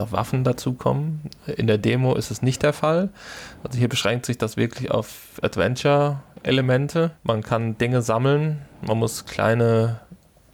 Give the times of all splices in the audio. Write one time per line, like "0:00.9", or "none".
0:07.1